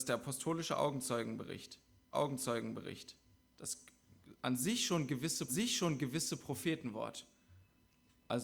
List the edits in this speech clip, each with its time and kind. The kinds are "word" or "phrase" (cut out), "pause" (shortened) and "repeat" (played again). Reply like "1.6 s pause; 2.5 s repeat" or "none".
2.1 s repeat; 5.5 s repeat